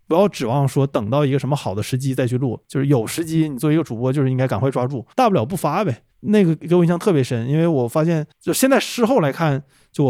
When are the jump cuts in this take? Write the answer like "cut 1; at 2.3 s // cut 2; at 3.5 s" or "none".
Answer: cut 1; at 5.1 s // cut 2; at 6.1 s